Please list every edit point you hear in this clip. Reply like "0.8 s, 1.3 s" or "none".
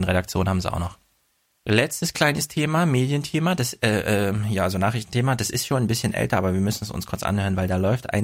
1.3 s